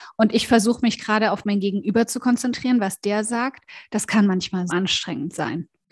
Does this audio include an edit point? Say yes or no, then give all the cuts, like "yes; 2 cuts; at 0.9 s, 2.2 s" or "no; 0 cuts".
yes; 1 cut; at 4.7 s